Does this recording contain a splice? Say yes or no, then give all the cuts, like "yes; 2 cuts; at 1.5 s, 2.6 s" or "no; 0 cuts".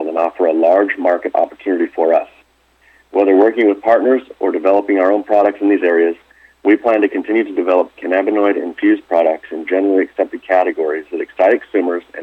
no; 0 cuts